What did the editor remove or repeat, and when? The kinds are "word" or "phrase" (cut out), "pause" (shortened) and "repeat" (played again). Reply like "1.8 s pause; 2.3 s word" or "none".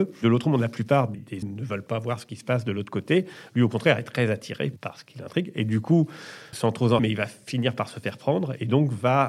1.4 s word; 6.5 s word; 7.0 s word